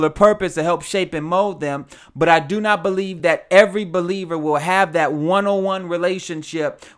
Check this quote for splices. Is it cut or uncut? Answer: uncut